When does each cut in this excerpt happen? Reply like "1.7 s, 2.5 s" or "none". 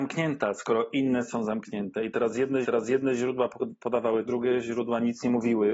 2.6 s, 4.3 s